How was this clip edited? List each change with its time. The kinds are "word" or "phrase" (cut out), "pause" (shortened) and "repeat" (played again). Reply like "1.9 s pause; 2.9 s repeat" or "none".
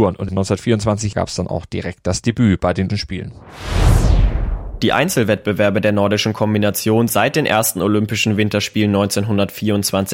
2.9 s word; 7.1 s word